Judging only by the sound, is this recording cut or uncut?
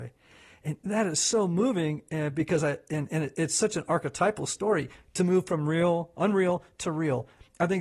uncut